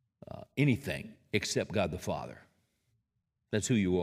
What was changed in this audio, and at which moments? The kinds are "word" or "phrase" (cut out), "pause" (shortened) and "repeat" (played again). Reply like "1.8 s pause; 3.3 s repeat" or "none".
none